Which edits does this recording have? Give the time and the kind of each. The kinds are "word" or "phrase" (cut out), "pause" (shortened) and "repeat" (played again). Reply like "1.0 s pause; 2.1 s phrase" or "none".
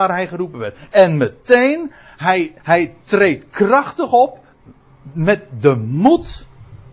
2.6 s pause